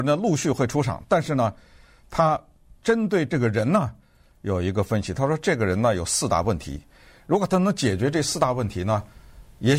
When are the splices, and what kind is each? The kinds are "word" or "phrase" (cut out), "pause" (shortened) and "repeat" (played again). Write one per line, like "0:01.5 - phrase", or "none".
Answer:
0:03.3 - word